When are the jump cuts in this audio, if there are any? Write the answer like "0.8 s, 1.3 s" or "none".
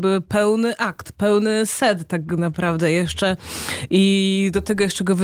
none